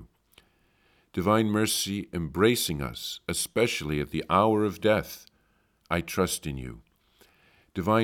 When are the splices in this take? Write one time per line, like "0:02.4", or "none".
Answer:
none